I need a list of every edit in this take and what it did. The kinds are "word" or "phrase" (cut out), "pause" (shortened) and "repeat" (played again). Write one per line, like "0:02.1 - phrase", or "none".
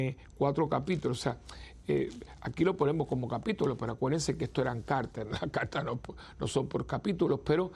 none